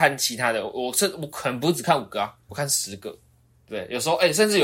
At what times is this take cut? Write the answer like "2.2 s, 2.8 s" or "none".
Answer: 2.5 s